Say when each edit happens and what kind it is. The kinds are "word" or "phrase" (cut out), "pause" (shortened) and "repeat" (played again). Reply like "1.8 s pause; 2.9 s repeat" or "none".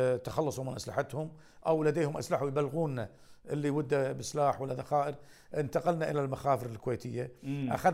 none